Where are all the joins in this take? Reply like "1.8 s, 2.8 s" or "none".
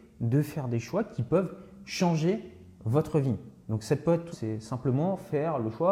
4.3 s

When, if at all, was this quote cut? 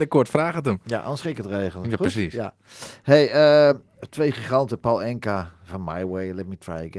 none

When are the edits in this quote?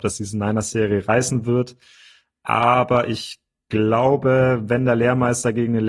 none

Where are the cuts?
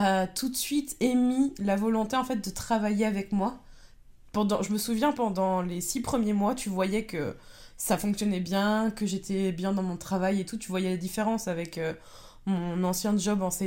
none

